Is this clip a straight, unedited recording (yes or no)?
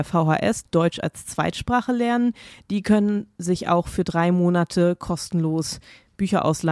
yes